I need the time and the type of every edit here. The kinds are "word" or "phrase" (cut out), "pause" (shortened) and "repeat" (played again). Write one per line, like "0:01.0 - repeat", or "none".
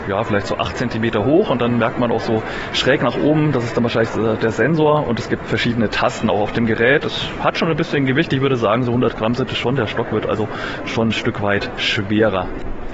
0:05.4 - word